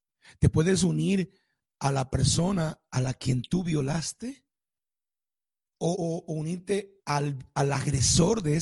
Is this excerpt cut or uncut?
cut